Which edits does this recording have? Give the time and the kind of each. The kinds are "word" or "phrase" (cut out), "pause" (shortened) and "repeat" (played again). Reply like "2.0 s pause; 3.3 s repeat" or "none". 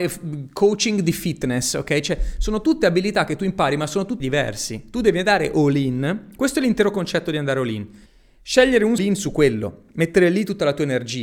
4.2 s phrase; 8.1 s pause; 9.0 s phrase